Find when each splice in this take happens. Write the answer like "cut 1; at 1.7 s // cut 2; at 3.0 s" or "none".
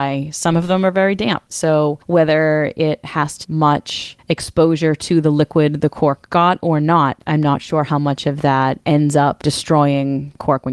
cut 1; at 3.4 s